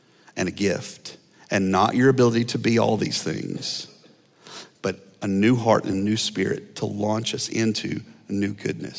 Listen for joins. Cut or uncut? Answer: uncut